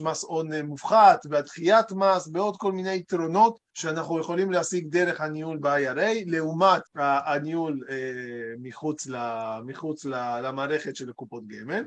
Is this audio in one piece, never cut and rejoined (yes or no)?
no